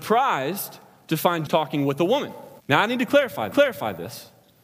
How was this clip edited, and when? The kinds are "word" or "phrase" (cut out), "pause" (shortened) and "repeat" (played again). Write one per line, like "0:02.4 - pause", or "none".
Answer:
0:01.5 - word
0:02.6 - pause
0:03.5 - repeat